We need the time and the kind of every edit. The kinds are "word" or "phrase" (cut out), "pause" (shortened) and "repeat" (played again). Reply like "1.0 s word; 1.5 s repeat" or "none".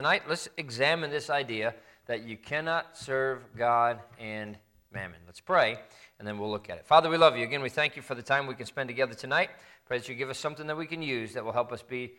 none